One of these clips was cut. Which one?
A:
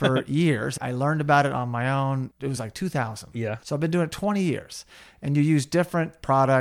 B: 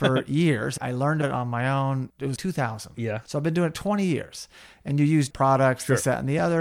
B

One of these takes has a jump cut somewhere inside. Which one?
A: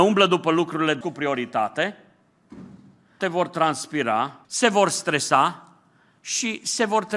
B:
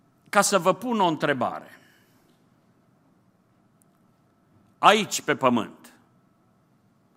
A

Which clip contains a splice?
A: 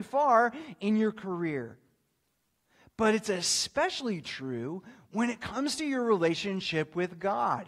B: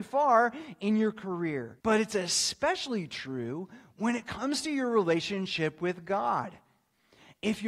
B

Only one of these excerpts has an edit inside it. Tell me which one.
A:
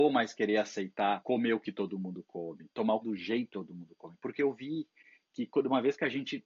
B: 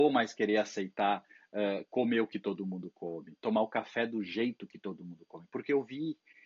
A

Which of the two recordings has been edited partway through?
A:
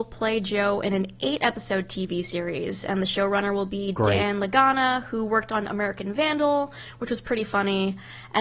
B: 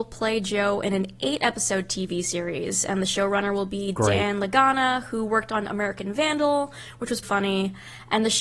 B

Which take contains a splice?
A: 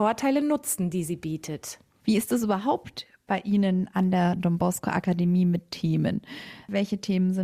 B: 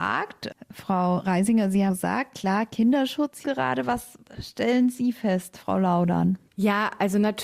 B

